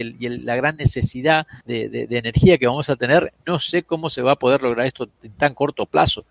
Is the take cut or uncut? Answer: cut